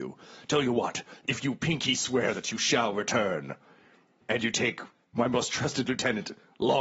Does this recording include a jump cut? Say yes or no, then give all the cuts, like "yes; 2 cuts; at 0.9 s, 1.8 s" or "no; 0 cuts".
no; 0 cuts